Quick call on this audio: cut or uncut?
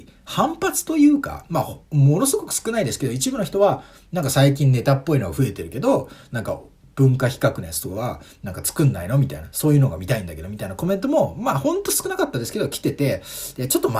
uncut